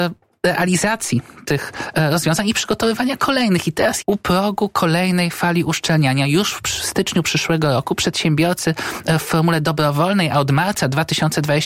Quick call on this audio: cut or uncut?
cut